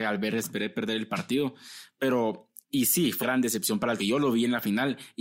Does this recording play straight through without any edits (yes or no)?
no